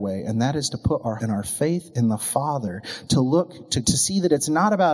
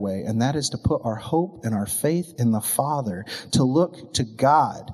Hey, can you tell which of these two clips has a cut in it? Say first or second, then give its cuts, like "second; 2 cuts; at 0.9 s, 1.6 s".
first; 2 cuts; at 1.2 s, 3.8 s